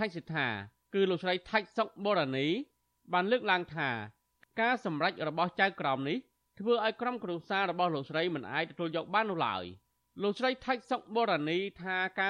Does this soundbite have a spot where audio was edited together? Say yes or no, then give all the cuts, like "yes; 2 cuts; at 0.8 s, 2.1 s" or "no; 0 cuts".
no; 0 cuts